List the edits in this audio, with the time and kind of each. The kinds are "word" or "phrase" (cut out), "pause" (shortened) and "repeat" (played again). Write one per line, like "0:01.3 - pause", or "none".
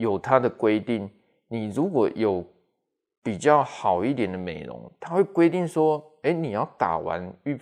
none